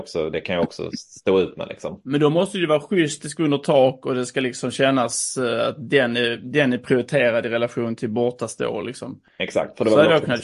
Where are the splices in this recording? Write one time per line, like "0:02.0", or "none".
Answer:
0:09.3